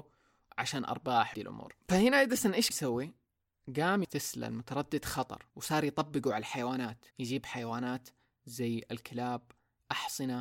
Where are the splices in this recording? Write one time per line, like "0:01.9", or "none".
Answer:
0:01.3
0:01.8
0:02.7
0:04.0
0:05.5
0:07.1